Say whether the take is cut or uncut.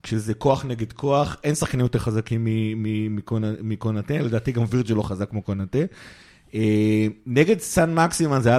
uncut